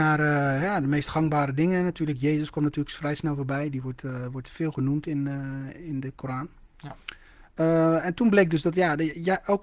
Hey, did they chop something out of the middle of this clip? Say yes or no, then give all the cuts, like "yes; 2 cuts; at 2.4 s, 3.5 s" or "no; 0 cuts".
no; 0 cuts